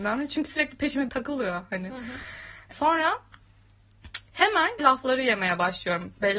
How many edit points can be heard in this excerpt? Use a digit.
3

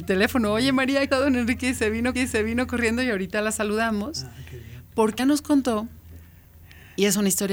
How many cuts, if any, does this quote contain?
3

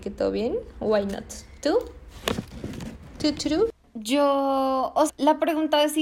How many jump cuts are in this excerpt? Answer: 1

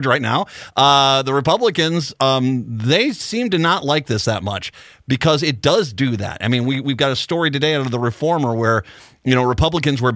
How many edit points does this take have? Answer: 0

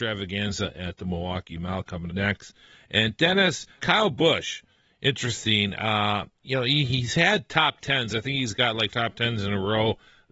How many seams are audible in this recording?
3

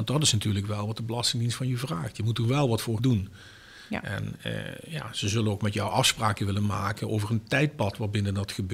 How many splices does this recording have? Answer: 1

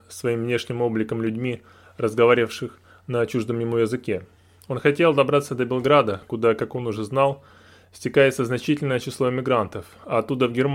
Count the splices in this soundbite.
0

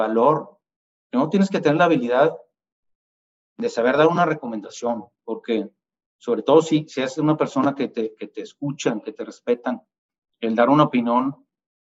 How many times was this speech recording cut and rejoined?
0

